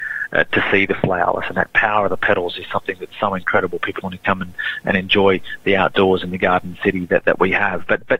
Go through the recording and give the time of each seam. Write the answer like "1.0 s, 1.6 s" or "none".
4.0 s

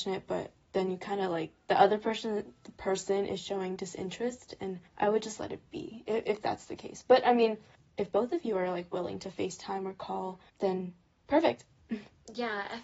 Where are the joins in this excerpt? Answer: 4.9 s, 7.7 s, 10.5 s

